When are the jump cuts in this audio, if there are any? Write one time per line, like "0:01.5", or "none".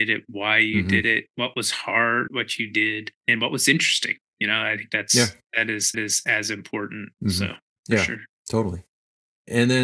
0:01.3
0:02.3
0:03.2
0:05.9
0:07.1
0:07.8
0:08.4